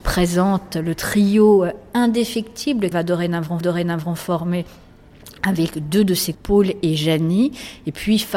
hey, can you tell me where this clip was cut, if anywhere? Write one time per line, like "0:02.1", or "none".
0:02.9
0:03.6
0:06.3